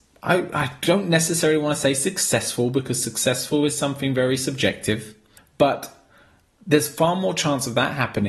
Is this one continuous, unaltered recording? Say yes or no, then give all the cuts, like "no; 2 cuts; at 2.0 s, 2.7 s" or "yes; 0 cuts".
no; 1 cut; at 5.4 s